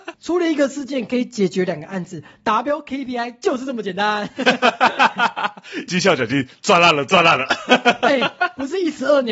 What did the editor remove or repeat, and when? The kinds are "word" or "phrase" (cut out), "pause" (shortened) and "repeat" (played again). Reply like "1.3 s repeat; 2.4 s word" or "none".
5.9 s phrase